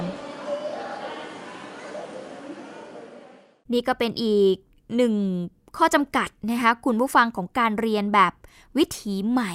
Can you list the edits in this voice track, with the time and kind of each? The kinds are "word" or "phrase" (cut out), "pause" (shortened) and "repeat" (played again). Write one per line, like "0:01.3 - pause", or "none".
none